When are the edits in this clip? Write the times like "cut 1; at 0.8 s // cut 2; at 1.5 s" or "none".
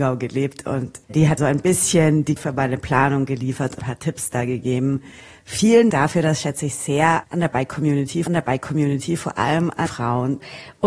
cut 1; at 1.0 s // cut 2; at 1.4 s // cut 3; at 2.4 s // cut 4; at 3.8 s // cut 5; at 5.9 s // cut 6; at 7.2 s // cut 7; at 8.3 s // cut 8; at 9.9 s